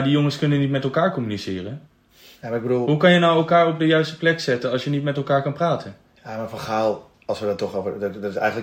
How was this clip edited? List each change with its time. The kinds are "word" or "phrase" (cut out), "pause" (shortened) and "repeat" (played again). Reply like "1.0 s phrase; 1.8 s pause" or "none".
none